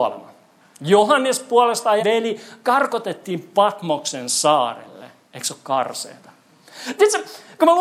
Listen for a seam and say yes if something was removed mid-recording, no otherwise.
yes